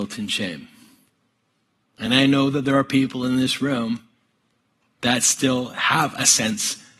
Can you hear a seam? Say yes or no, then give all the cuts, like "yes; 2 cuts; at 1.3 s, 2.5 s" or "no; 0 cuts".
no; 0 cuts